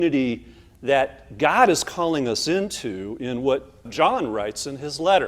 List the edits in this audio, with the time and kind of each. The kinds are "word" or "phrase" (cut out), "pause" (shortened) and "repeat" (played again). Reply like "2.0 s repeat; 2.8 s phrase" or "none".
3.9 s word